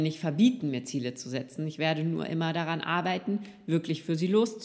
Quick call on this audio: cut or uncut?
uncut